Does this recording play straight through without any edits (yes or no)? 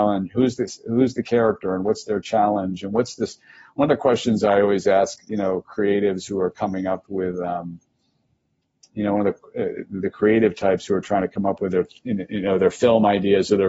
yes